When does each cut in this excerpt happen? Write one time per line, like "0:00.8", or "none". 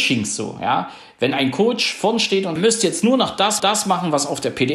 0:02.6
0:03.6